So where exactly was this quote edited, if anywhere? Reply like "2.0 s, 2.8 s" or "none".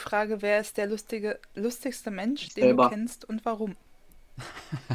3.9 s